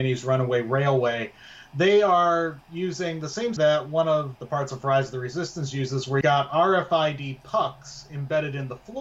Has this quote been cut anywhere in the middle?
yes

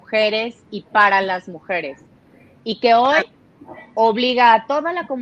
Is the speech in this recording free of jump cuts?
yes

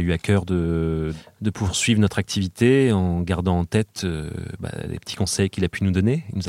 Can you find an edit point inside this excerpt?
no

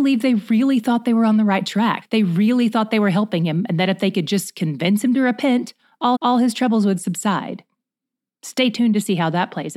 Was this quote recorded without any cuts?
no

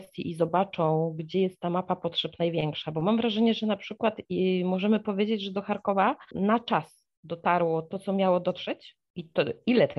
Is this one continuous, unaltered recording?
yes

